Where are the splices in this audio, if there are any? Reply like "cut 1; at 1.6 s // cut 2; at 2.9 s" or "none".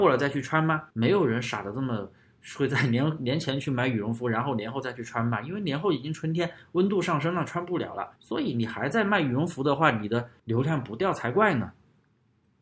cut 1; at 0.9 s // cut 2; at 8.2 s // cut 3; at 10.4 s